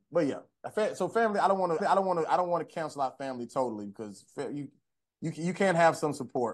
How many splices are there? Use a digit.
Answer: 1